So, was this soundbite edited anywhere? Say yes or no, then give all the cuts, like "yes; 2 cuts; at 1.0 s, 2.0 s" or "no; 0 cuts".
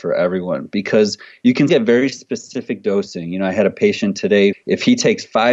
yes; 2 cuts; at 1.7 s, 4.5 s